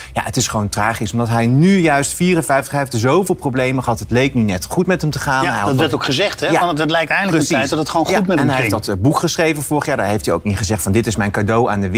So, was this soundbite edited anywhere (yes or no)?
no